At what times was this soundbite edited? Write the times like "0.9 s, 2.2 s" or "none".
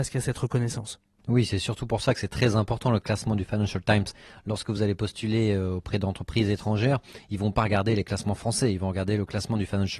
none